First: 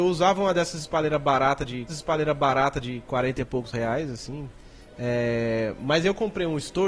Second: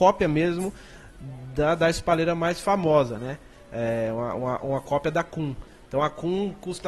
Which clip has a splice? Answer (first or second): first